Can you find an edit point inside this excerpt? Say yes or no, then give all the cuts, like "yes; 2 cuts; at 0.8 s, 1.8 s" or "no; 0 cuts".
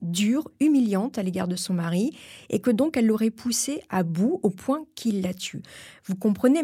no; 0 cuts